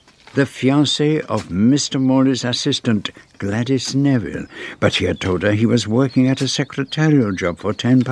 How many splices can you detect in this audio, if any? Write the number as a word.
zero